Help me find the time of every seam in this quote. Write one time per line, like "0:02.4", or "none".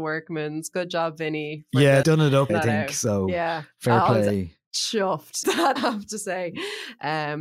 0:02.0
0:02.5
0:05.4
0:05.8